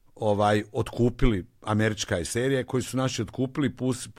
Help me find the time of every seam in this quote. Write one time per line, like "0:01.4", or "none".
none